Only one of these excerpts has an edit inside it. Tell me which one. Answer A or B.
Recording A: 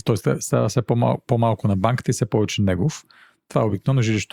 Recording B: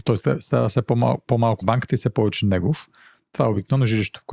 B